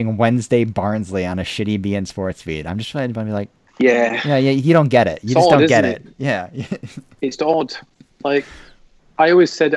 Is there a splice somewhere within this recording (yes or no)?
yes